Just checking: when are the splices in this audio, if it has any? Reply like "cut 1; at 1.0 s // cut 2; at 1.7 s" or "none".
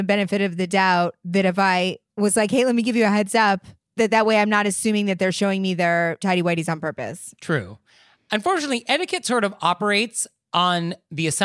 none